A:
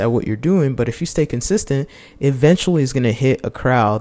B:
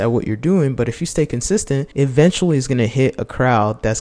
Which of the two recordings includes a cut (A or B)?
B